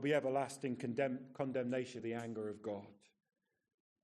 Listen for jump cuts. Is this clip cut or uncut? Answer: cut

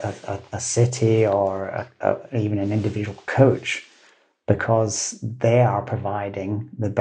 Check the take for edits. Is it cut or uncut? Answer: uncut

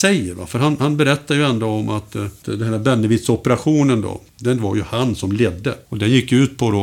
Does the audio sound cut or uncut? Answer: cut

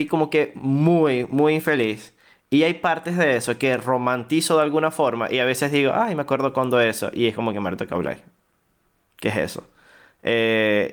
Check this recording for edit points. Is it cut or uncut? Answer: uncut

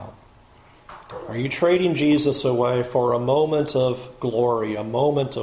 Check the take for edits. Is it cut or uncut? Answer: uncut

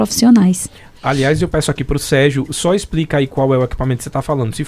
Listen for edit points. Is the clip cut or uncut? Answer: uncut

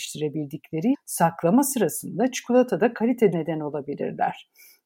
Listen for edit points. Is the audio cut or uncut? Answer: cut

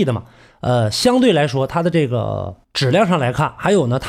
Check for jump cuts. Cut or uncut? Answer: cut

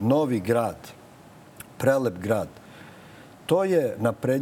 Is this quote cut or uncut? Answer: uncut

